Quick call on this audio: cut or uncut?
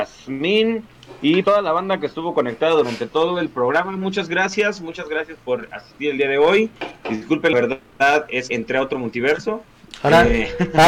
cut